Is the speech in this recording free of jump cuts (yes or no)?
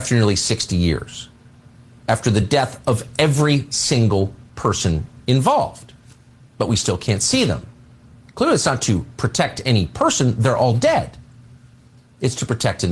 yes